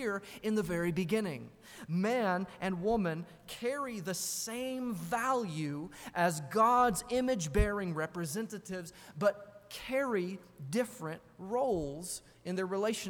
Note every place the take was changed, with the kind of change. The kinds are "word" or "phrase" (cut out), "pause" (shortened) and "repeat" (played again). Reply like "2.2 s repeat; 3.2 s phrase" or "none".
none